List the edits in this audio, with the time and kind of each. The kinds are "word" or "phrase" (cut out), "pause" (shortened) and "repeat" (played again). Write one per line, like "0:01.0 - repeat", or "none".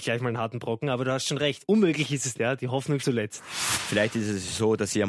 0:02.3 - word
0:03.0 - word

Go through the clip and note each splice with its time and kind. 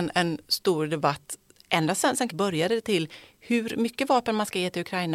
0:02.3 - word

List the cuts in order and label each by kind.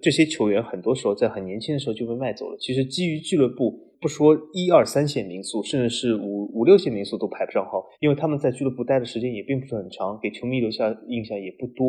0:07.9 - pause

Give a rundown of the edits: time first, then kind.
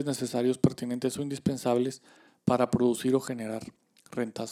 none

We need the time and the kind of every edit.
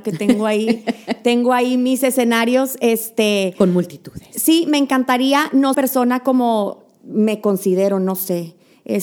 0:05.7 - phrase

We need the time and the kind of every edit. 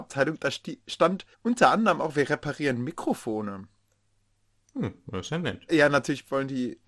0:01.3 - pause
0:05.7 - word

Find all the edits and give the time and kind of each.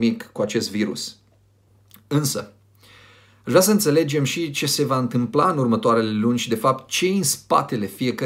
none

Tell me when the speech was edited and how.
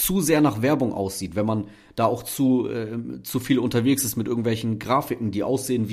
none

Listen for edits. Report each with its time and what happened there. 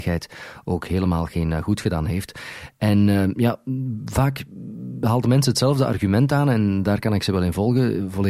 none

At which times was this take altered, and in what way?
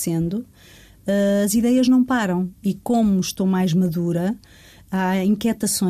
none

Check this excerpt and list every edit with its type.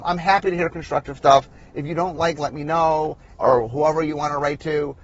0:02.4 - word
0:03.4 - word

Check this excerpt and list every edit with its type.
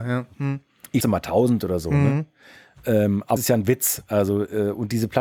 0:01.0 - word
0:03.4 - word

